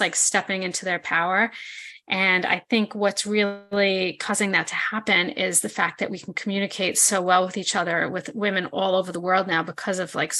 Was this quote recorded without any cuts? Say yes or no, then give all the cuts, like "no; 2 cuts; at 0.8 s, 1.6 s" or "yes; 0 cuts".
yes; 0 cuts